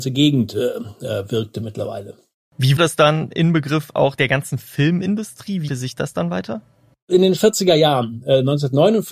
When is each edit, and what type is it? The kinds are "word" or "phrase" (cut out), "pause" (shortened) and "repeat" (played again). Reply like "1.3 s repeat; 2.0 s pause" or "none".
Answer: 2.8 s word; 3.3 s word; 4.2 s word; 5.7 s word; 7.4 s word